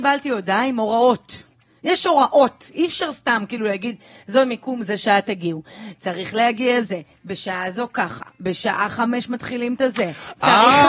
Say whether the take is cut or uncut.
uncut